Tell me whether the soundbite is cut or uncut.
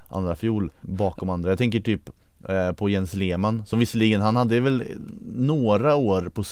uncut